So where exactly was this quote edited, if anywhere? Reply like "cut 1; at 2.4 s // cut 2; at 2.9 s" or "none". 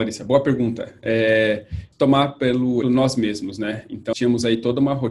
cut 1; at 1.9 s // cut 2; at 2.8 s // cut 3; at 4.1 s